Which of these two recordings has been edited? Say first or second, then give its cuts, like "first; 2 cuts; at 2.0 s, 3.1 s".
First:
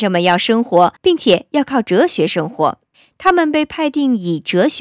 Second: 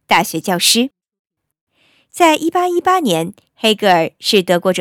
first; 2 cuts; at 1.0 s, 2.9 s